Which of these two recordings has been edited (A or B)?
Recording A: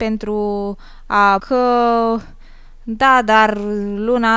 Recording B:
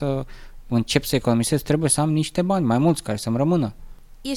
A